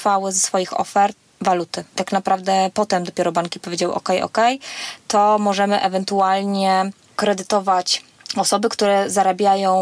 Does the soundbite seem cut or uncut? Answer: cut